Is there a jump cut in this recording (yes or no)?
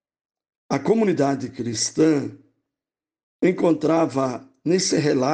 no